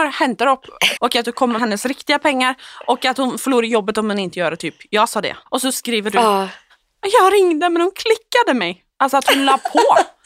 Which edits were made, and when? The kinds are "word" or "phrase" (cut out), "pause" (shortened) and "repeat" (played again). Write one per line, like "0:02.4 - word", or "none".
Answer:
0:01.0 - word
0:01.6 - word
0:05.5 - pause
0:08.9 - pause